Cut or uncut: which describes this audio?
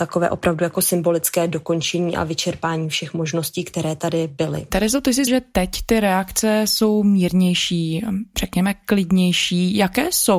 cut